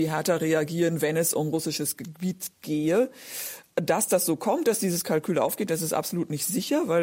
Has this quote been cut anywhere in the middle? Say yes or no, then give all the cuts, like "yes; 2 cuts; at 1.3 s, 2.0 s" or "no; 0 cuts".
no; 0 cuts